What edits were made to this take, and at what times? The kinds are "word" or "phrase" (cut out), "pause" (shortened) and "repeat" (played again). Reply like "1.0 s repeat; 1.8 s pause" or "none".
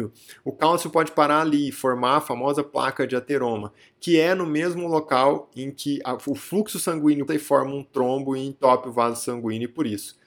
7.3 s word